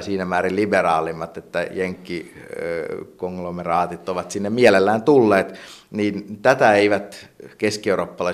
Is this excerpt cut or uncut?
uncut